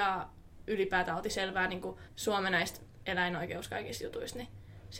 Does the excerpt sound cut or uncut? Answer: cut